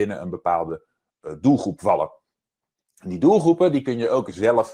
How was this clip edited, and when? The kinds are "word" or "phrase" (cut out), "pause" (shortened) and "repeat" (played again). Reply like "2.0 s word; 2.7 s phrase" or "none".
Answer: none